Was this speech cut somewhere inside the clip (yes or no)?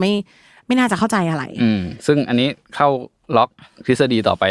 no